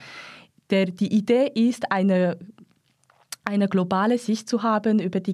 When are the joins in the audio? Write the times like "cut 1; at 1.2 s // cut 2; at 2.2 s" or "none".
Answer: none